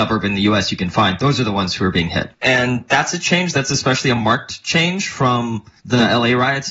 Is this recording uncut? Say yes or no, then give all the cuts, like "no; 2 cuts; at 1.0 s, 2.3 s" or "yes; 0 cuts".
yes; 0 cuts